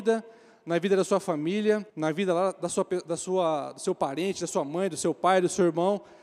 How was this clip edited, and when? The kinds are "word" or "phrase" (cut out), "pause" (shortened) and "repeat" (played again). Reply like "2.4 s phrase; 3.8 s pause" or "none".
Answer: 1.9 s pause